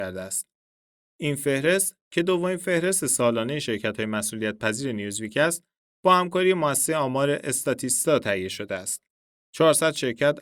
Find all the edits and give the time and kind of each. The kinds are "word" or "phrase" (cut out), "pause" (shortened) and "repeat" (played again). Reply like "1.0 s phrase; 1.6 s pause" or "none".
none